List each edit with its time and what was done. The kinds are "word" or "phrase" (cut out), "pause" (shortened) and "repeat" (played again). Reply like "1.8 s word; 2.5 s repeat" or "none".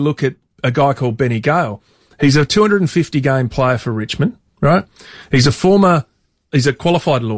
none